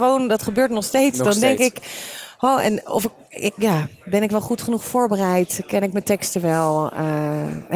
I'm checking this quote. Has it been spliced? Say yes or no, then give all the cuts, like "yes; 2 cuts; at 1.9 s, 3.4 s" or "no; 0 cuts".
no; 0 cuts